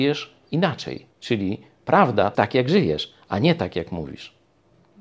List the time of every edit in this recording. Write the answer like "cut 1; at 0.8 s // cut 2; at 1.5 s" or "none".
cut 1; at 1.1 s // cut 2; at 2.3 s